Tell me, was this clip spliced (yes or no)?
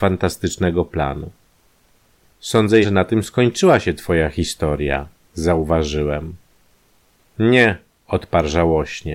yes